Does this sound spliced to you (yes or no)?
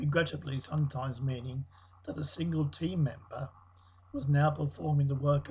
no